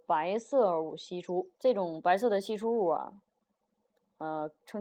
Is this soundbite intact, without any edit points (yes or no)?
no